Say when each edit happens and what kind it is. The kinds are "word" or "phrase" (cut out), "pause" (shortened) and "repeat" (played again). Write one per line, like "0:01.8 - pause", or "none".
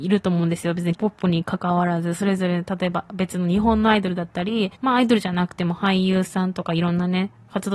0:01.0 - word
0:04.8 - pause